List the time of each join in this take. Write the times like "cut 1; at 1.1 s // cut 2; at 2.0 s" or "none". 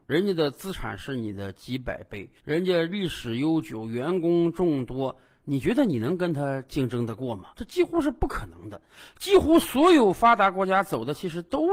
cut 1; at 2.4 s // cut 2; at 7.5 s